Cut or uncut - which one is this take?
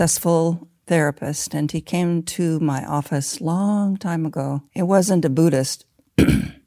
cut